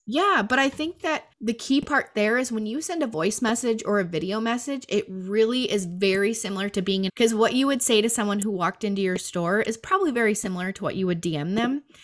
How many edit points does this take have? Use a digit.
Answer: 2